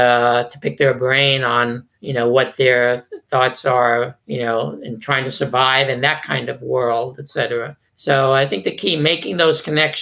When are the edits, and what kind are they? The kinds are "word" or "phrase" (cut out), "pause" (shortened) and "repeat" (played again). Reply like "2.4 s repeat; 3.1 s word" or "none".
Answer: 1.9 s pause; 4.2 s pause; 7.9 s pause